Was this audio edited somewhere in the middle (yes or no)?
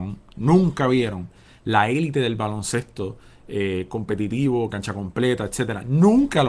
no